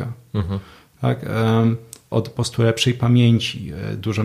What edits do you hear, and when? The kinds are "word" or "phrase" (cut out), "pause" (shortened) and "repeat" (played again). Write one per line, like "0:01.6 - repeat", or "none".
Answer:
0:02.1 - word